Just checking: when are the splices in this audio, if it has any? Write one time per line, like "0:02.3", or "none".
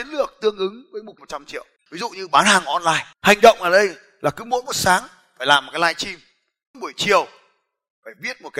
0:01.2
0:01.8
0:03.1
0:06.7